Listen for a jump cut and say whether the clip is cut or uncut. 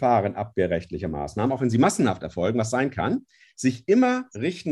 uncut